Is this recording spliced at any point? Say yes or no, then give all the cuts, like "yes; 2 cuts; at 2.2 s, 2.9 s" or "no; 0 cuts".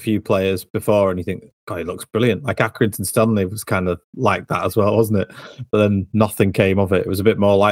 no; 0 cuts